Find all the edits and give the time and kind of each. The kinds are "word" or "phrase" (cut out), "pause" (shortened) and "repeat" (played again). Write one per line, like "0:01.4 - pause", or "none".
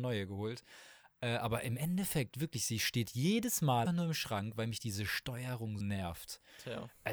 0:03.9 - word
0:05.8 - word